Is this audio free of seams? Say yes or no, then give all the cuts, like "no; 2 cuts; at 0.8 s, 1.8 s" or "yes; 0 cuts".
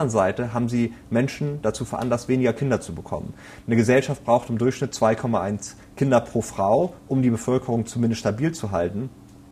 yes; 0 cuts